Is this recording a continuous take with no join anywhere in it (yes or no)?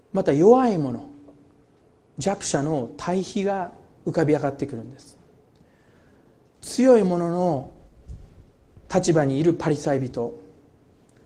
yes